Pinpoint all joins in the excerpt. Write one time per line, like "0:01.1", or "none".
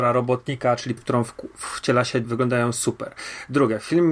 0:01.0
0:02.2

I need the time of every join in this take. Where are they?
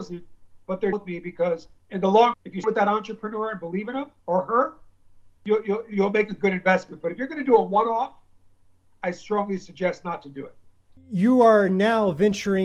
0:00.9
0:01.8
0:02.3
0:02.6
0:04.2
0:05.4

